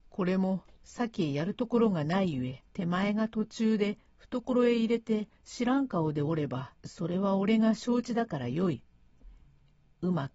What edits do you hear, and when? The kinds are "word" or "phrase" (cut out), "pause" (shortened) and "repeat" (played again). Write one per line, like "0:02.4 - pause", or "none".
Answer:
0:02.7 - pause
0:05.4 - pause
0:06.8 - pause